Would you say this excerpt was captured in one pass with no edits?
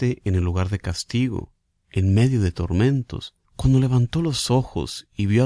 no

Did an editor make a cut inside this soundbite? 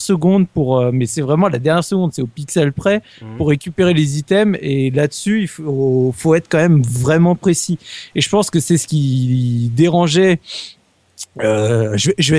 no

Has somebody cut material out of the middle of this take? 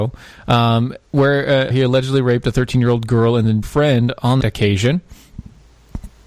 yes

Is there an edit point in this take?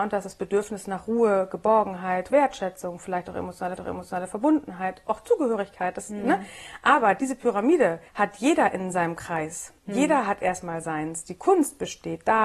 yes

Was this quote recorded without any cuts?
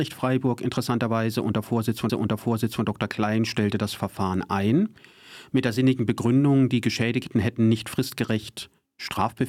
no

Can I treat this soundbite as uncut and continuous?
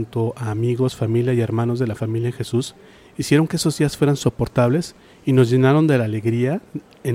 yes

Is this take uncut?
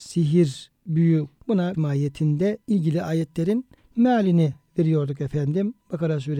no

